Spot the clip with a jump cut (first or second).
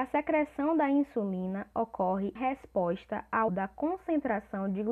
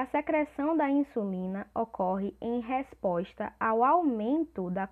first